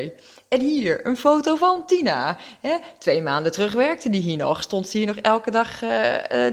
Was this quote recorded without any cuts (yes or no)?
yes